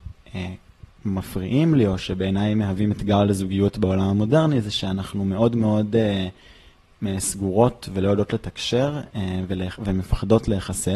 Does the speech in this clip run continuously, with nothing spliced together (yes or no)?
yes